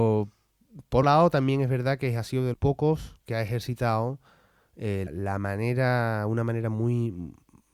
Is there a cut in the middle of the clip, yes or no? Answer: yes